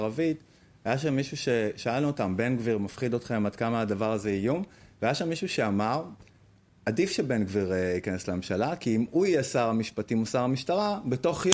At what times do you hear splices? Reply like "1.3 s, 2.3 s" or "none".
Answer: none